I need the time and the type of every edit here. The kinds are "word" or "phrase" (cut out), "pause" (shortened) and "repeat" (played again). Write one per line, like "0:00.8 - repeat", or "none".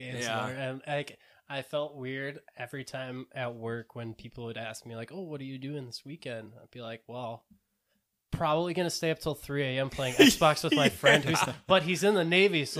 none